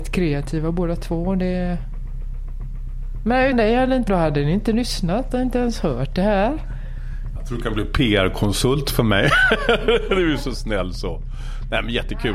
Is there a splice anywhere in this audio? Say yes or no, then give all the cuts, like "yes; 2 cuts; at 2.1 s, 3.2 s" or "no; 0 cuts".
yes; 2 cuts; at 3.5 s, 4.1 s